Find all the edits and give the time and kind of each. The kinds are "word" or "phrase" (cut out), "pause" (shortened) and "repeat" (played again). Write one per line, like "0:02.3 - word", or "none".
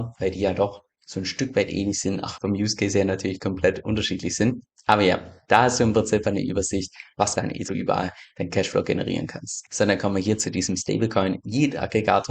0:02.4 - phrase
0:06.2 - word
0:07.4 - phrase
0:07.7 - phrase

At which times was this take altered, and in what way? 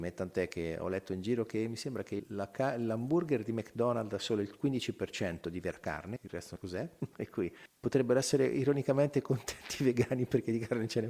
none

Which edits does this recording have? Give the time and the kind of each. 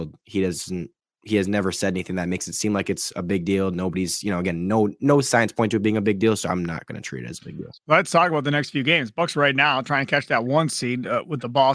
none

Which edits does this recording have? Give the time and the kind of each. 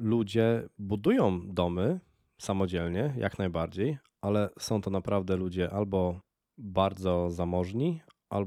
none

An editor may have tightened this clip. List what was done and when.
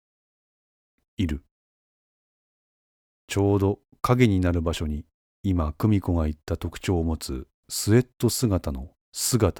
none

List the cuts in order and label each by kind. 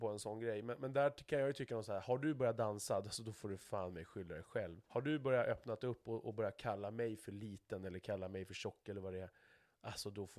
0:04.8 - pause

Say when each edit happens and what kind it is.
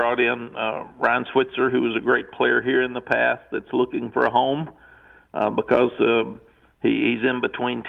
none

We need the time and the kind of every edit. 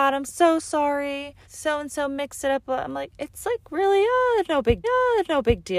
0:01.4 - pause
0:04.8 - repeat

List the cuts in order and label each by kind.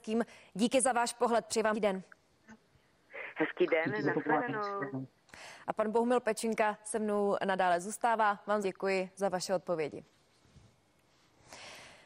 0:01.7 - word
0:08.6 - word

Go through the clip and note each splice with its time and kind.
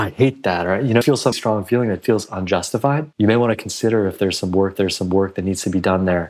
0:01.0 - word
0:01.3 - word
0:03.1 - pause
0:04.8 - repeat

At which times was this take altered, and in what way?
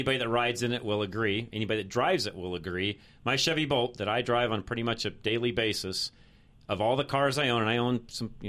none

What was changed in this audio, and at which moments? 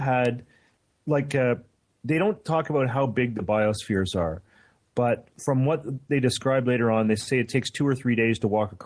0:05.3 - pause

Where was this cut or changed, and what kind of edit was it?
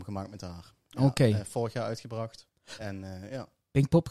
0:02.5 - pause

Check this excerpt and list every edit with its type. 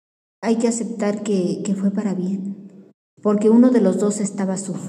none

